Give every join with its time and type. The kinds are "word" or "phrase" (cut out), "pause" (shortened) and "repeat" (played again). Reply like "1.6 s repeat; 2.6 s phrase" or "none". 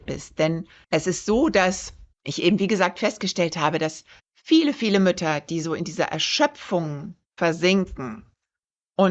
2.1 s pause; 4.2 s pause; 7.2 s pause

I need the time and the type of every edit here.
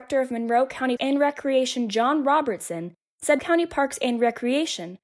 1.0 s word; 3.4 s word

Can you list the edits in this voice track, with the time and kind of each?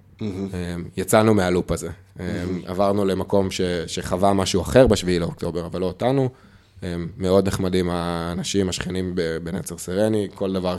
none

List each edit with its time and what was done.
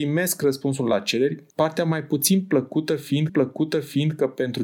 1.5 s pause; 3.3 s repeat

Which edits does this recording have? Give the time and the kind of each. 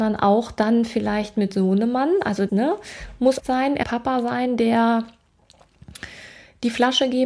2.5 s word; 3.4 s word; 3.8 s phrase

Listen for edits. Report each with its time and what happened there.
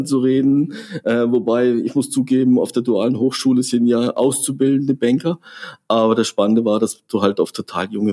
none

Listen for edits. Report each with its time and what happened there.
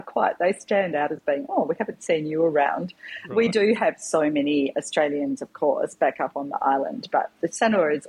none

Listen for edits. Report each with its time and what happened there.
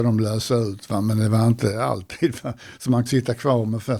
3.1 s word

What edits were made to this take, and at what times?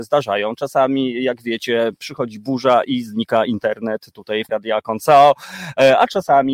4.5 s word

